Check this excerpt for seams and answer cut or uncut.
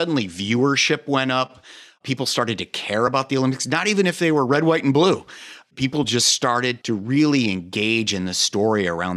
uncut